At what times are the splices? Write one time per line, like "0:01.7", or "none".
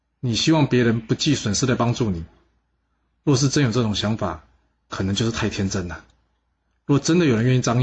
none